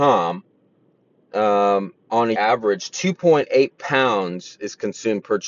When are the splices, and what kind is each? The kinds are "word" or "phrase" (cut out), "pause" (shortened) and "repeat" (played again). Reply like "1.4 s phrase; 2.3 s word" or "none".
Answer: 2.0 s pause; 2.3 s word